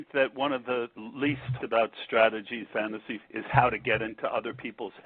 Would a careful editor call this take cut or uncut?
cut